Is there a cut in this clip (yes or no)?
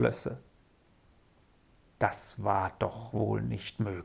no